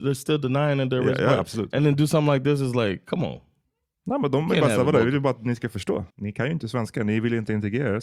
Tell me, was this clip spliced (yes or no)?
yes